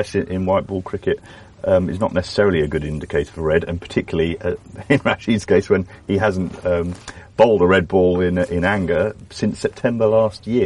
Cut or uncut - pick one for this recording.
uncut